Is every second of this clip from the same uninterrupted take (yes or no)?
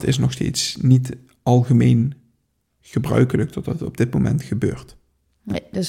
yes